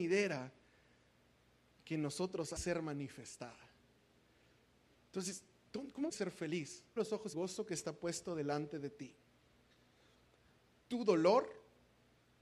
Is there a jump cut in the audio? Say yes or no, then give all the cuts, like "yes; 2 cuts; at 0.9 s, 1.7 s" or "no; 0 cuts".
yes; 4 cuts; at 2.6 s, 6.1 s, 7.0 s, 7.3 s